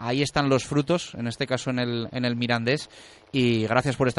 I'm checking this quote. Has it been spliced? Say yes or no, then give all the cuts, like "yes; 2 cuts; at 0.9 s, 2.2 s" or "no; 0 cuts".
no; 0 cuts